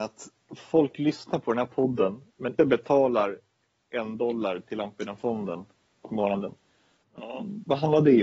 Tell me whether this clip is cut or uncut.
cut